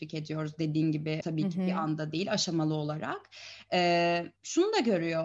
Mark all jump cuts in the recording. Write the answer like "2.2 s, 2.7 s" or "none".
1.2 s, 4.4 s